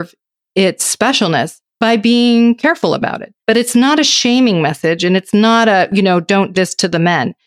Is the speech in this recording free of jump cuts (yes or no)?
no